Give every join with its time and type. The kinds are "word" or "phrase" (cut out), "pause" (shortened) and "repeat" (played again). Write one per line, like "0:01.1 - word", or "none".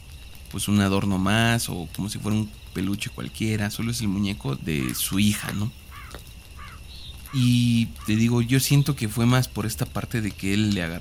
0:04.6 - word